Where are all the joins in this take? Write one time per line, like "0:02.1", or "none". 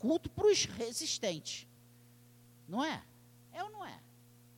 none